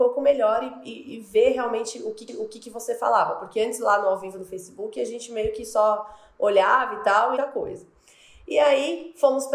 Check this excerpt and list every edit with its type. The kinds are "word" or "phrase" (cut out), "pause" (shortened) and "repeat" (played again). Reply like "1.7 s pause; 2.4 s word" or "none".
2.3 s repeat; 7.4 s phrase